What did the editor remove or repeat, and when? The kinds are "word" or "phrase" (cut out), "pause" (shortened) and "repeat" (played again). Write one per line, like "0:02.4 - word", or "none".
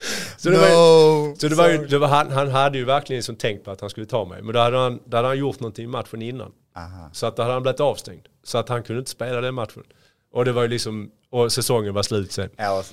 none